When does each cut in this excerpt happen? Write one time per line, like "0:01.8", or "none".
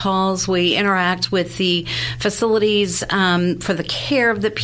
none